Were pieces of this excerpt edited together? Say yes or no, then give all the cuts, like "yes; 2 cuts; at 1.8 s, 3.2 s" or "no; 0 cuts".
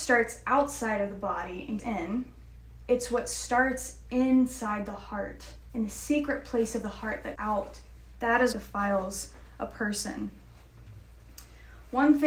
yes; 3 cuts; at 1.8 s, 7.4 s, 8.5 s